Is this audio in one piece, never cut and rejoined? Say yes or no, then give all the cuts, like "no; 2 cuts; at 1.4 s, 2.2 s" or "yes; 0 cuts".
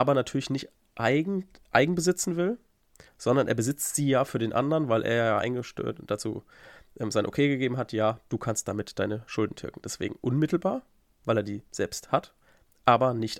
yes; 0 cuts